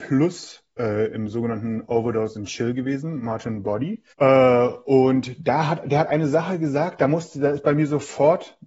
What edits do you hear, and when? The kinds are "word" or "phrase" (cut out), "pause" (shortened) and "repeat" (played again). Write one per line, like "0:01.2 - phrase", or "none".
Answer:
0:04.1 - pause

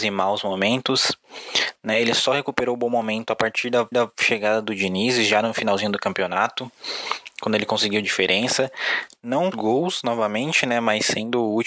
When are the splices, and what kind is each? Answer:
0:03.9 - repeat
0:08.0 - phrase
0:09.5 - phrase

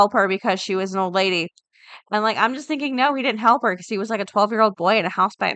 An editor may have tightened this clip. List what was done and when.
none

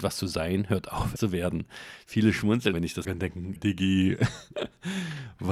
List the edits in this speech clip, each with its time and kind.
0:01.2 - word
0:02.7 - word
0:03.0 - word
0:03.6 - word

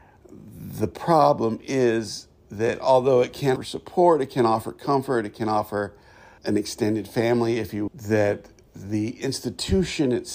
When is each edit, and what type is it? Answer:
0:03.6 - word
0:06.4 - word
0:07.9 - word

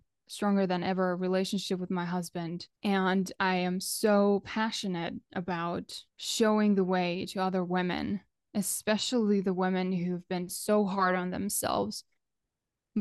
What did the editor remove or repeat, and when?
0:02.8 - pause
0:06.1 - pause

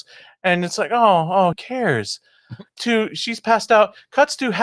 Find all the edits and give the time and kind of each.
0:01.5 - word
0:02.8 - word

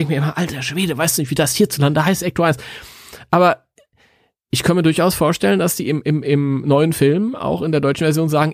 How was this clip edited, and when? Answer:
none

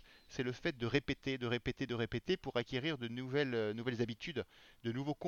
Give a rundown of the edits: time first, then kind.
none

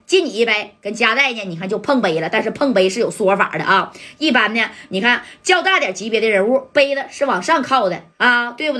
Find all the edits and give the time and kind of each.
none

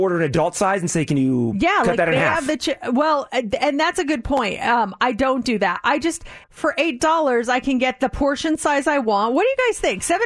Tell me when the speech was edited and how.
0:06.4 - phrase

